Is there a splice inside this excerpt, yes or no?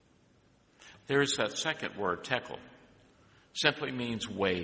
no